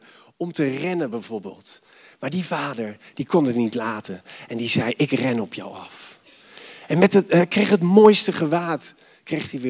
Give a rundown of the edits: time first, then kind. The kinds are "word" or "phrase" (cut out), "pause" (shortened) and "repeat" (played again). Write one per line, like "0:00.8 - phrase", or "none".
none